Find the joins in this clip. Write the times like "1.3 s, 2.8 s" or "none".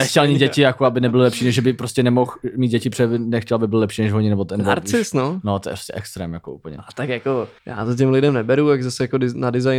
7.6 s

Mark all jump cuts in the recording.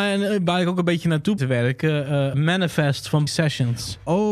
1.4 s, 2.3 s, 3.3 s

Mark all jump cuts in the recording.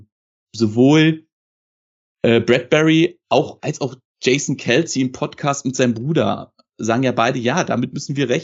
none

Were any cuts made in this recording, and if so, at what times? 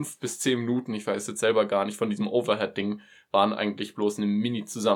none

